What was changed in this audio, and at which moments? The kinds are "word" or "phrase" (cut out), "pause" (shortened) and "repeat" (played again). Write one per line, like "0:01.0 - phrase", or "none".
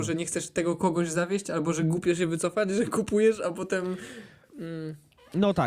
none